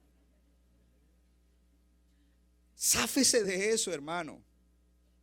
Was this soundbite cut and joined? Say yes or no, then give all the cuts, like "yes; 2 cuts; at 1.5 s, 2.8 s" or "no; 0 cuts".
no; 0 cuts